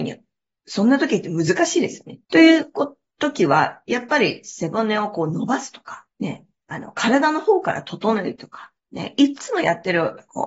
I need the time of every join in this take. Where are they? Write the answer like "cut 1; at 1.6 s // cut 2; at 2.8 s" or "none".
cut 1; at 2.2 s // cut 2; at 6.1 s // cut 3; at 8.8 s